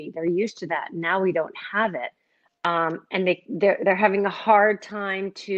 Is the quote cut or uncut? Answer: uncut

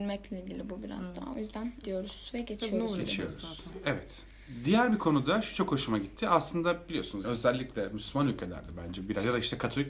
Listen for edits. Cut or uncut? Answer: cut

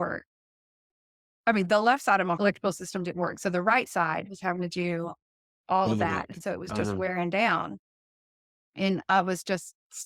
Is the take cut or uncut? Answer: cut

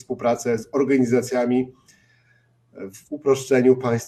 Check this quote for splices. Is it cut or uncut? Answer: uncut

